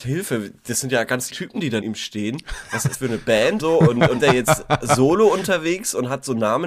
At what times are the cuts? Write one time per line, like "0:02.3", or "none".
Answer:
0:01.3
0:01.8
0:02.9
0:03.6
0:04.2